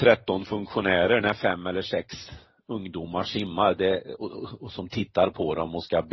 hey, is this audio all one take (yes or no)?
yes